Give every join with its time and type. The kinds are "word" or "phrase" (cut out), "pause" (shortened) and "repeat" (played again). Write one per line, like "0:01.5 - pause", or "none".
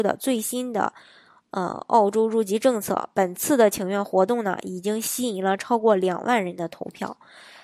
none